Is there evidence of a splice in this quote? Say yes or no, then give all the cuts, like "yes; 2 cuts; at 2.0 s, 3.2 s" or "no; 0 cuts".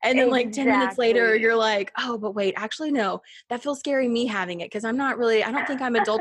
no; 0 cuts